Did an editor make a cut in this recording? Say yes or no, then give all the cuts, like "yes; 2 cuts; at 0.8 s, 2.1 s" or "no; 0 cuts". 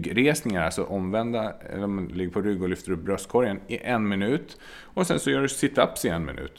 no; 0 cuts